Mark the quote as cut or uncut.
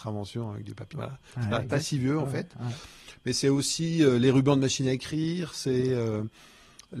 cut